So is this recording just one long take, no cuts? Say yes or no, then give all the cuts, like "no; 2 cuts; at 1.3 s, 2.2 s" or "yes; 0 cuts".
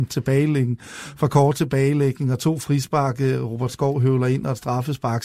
yes; 0 cuts